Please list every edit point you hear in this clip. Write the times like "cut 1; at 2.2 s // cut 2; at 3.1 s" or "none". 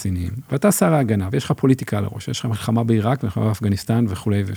none